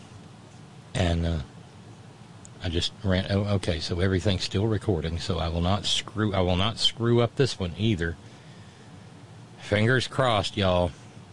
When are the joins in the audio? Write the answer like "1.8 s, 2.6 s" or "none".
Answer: none